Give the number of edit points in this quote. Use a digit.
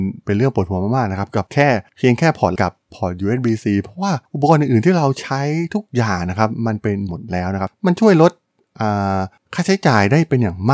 2